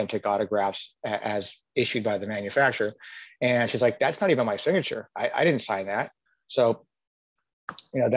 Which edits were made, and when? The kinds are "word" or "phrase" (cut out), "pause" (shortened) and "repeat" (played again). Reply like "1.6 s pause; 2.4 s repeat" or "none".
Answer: 6.3 s pause